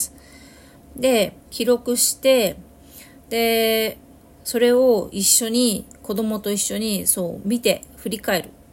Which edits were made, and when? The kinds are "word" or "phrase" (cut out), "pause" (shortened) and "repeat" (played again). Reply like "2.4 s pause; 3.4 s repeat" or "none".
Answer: 1.4 s pause; 4.1 s pause